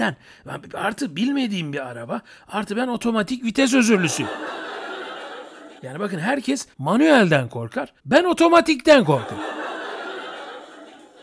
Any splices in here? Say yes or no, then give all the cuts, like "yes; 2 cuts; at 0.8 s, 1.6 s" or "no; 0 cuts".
yes; 3 cuts; at 5.8 s, 6.7 s, 8.0 s